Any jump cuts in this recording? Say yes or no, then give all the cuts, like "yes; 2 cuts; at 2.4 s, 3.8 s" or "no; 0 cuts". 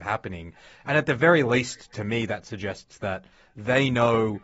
no; 0 cuts